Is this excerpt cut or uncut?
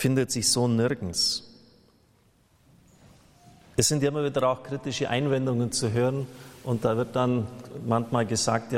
uncut